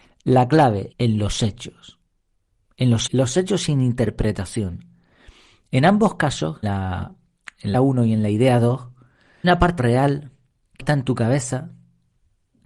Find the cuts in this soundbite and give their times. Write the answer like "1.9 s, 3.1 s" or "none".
0.9 s, 3.1 s, 6.6 s, 7.7 s, 9.4 s, 9.8 s, 10.8 s